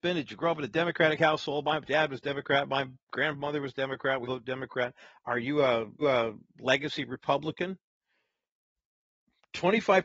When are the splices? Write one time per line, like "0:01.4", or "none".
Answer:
0:04.2
0:06.0

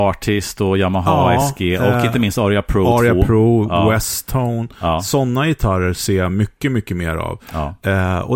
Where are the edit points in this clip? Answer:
none

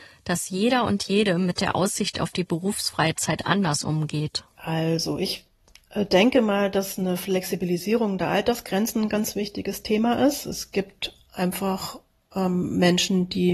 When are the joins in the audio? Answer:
none

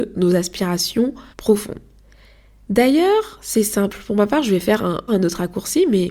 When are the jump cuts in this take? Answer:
0:01.3
0:05.1

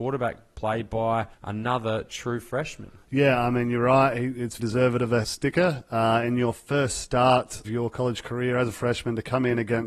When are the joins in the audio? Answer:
0:01.3
0:04.6
0:05.2
0:07.6

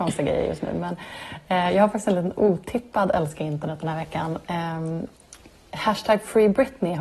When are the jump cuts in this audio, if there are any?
none

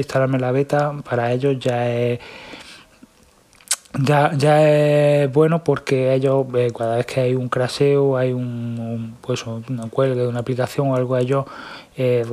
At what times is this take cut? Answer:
none

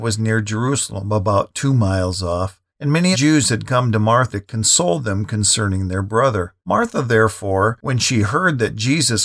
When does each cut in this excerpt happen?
0:02.7
0:03.1
0:04.3
0:06.6

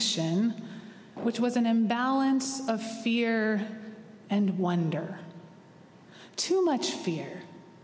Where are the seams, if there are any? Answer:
none

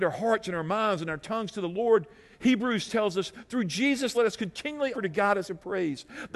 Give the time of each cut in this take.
0:02.9
0:04.1
0:04.9
0:05.4

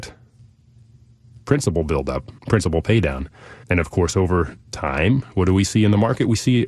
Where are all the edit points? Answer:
0:02.4
0:03.6

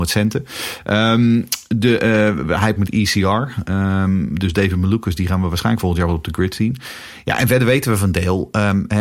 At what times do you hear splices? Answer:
0:02.8

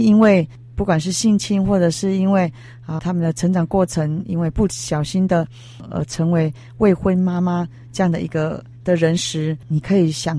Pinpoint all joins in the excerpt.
0:03.0

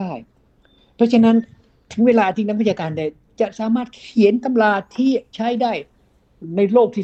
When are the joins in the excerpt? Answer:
none

